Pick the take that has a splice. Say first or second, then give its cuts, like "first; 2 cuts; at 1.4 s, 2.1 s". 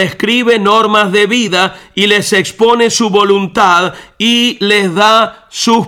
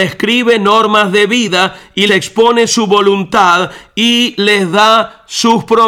second; 1 cut; at 2.1 s